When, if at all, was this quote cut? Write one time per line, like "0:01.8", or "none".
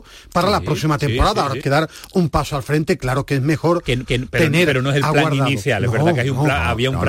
0:01.6
0:04.1